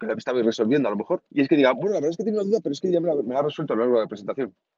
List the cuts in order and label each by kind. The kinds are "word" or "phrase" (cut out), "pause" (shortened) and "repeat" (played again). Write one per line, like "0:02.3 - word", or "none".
0:01.3 - pause